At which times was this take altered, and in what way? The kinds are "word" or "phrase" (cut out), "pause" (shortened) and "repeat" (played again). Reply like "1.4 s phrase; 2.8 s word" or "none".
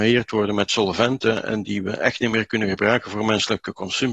1.6 s word